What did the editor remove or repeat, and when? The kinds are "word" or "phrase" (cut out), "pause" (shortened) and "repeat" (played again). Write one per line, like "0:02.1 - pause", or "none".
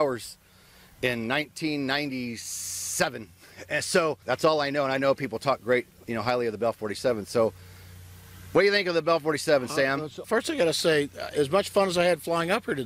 0:04.2 - pause
0:10.2 - word